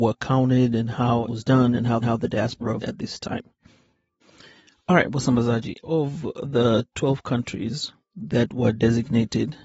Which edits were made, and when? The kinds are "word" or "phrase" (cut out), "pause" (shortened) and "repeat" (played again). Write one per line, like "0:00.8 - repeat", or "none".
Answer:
0:01.3 - word
0:02.0 - repeat
0:02.8 - word
0:05.8 - word